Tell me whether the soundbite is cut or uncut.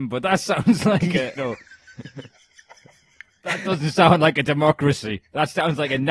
cut